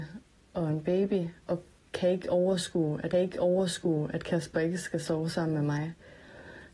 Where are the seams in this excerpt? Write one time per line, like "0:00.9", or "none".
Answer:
0:01.4
0:03.1

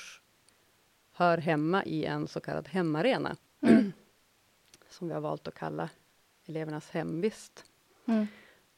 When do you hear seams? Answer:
none

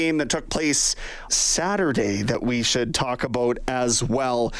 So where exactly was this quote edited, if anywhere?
0:01.3

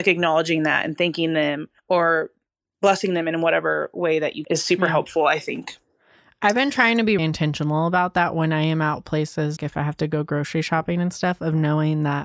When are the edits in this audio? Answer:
0:01.8
0:04.4
0:07.2
0:09.6

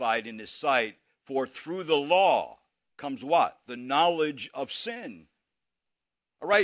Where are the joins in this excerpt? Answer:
none

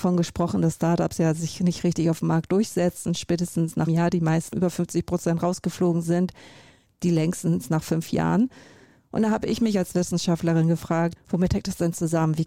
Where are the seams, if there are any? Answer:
0:03.9
0:04.5
0:11.2

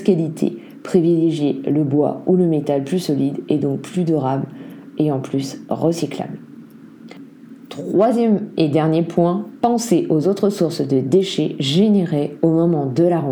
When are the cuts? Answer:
none

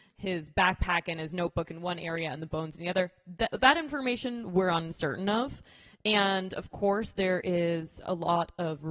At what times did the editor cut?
none

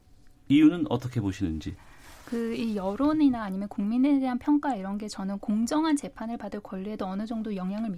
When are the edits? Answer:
none

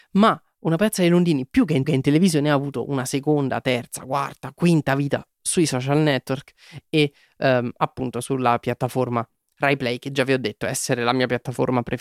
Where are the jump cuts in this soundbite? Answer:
0:01.8

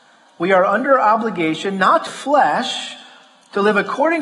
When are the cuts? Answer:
0:02.1

